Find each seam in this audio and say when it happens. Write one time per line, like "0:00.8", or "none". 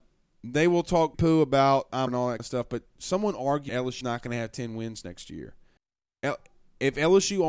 0:01.1
0:02.1
0:02.4
0:03.7
0:04.0
0:05.8